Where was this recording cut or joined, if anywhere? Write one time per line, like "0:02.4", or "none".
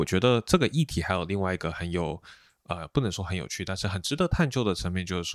none